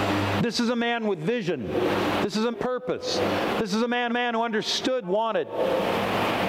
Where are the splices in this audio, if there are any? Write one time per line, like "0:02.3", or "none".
0:02.5
0:04.1
0:05.0